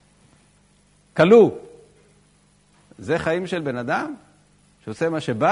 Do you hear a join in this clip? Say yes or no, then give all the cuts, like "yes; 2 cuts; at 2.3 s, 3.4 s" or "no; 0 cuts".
no; 0 cuts